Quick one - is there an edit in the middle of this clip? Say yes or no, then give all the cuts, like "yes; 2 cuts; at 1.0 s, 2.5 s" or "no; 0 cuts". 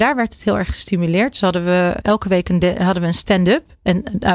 yes; 1 cut; at 2.0 s